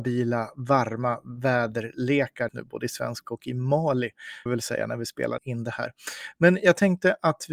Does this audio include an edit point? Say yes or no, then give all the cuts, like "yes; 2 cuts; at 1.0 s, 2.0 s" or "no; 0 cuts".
yes; 4 cuts; at 2.5 s, 3.2 s, 4.5 s, 5.4 s